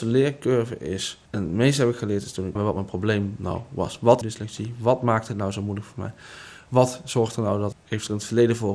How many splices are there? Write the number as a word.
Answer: four